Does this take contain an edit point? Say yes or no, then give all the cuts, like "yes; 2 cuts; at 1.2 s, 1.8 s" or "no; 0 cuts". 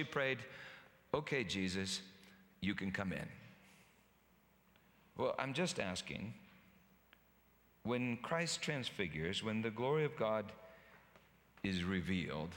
no; 0 cuts